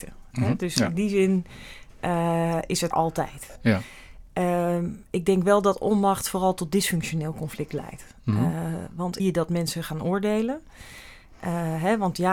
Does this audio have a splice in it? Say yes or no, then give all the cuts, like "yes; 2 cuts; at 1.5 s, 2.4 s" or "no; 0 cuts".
yes; 2 cuts; at 2.9 s, 9.2 s